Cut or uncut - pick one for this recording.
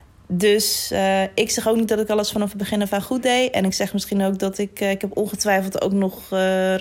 uncut